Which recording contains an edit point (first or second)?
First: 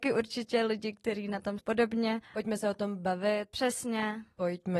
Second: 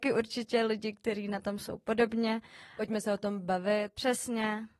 first